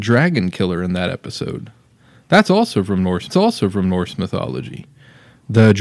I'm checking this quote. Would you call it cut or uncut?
cut